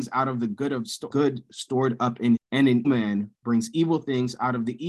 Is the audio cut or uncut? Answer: cut